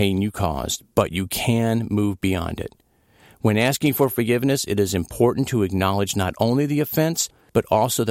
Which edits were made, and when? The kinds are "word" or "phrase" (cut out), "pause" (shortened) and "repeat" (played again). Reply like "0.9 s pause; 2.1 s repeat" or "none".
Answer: none